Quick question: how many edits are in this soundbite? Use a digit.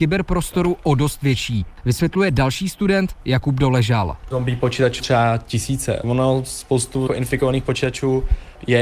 2